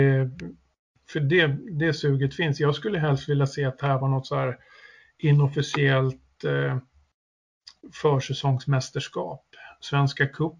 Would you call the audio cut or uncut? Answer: uncut